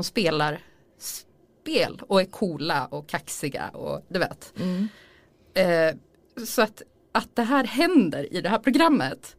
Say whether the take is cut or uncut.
uncut